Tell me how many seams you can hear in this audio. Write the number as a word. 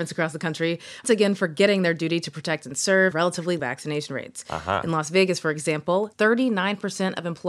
four